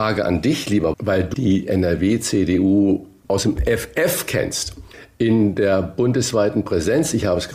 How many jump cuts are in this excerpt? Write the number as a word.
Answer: two